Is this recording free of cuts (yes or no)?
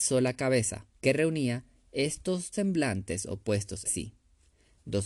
no